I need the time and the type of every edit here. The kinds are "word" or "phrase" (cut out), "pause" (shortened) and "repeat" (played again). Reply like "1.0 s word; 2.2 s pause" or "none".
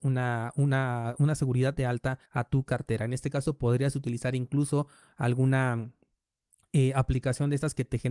1.8 s word; 2.3 s pause